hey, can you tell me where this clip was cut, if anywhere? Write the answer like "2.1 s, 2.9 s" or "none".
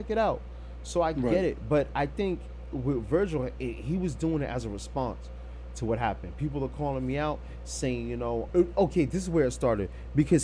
8.5 s